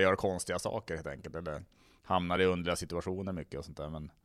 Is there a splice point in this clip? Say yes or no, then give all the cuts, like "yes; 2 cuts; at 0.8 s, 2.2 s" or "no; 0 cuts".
no; 0 cuts